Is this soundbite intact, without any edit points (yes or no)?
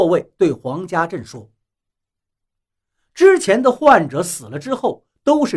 yes